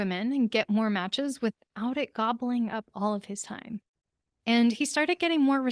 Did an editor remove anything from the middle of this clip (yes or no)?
no